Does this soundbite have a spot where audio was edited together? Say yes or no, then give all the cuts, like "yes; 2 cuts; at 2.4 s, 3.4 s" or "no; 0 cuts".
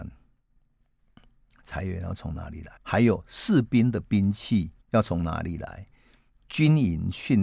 yes; 2 cuts; at 2.8 s, 4.8 s